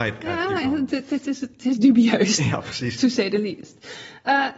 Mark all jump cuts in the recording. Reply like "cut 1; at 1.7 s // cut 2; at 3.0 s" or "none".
none